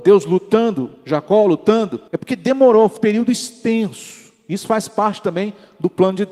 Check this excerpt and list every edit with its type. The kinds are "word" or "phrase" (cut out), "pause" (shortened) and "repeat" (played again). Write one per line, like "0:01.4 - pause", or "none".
0:02.1 - pause
0:03.0 - word